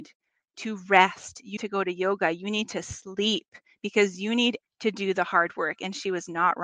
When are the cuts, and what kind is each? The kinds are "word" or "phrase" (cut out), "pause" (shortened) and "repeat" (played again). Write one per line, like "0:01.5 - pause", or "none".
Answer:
0:01.6 - word
0:04.6 - word